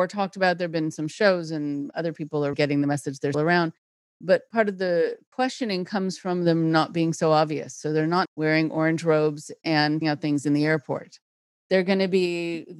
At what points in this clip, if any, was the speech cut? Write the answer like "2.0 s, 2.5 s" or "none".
2.5 s, 3.3 s, 8.2 s, 10.0 s